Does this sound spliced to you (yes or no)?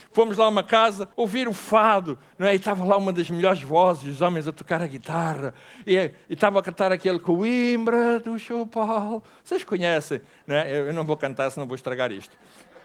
yes